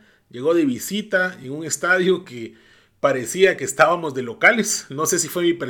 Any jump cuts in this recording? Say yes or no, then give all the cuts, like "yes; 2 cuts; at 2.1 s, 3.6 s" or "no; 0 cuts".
no; 0 cuts